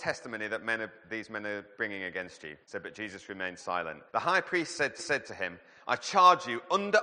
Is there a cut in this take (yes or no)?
yes